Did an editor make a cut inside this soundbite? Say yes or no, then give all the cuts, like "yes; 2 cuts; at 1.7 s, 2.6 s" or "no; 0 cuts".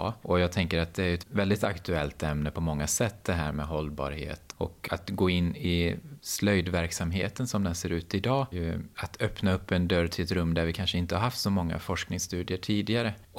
no; 0 cuts